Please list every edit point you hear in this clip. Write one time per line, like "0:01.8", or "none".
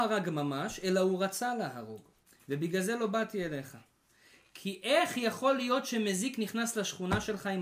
0:02.2